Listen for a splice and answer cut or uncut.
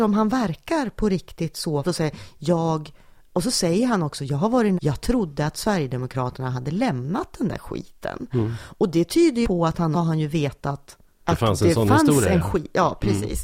cut